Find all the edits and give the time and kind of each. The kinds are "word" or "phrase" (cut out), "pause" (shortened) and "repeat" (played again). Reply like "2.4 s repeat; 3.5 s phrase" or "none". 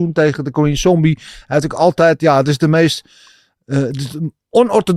none